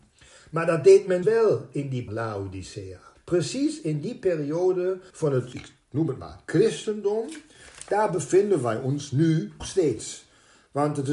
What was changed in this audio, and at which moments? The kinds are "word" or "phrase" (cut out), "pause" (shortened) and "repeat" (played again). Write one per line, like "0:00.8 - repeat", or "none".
0:01.2 - word
0:02.1 - phrase
0:03.2 - pause
0:05.1 - pause
0:05.5 - word
0:09.6 - word